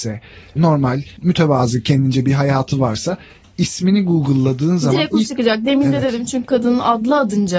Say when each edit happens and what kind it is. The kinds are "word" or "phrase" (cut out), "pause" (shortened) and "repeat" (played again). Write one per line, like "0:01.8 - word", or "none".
0:06.4 - word